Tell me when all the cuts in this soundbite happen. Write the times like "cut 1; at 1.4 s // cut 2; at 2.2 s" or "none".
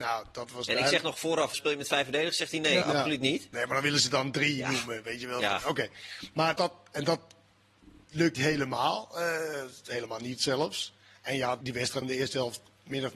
cut 1; at 1.5 s // cut 2; at 2.8 s // cut 3; at 6.6 s // cut 4; at 8.3 s // cut 5; at 11.6 s // cut 6; at 12.0 s